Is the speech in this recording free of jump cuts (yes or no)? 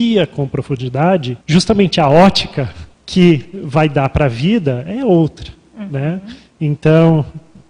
no